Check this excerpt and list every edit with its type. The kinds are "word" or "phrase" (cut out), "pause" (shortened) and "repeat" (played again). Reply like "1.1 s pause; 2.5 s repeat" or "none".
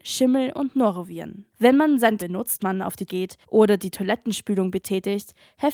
1.5 s pause; 2.2 s word; 2.6 s word; 3.1 s word; 3.4 s pause